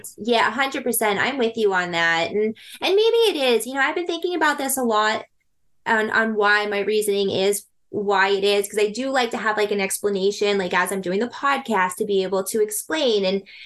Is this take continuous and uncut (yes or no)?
yes